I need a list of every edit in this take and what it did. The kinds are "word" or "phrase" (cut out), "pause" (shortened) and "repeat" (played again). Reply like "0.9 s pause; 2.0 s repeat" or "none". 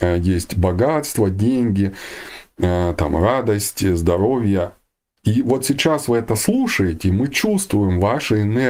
none